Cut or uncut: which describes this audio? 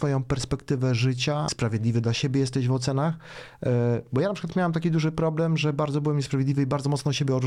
cut